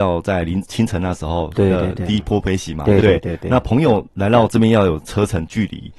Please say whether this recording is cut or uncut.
cut